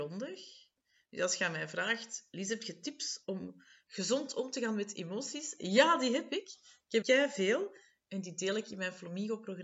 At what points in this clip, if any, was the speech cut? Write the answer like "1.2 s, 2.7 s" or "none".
7.0 s